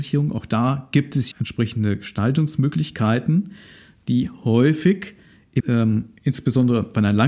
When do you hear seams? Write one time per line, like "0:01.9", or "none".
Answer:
0:01.3
0:05.6